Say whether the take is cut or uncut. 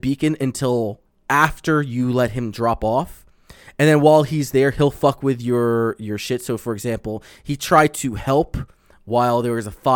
uncut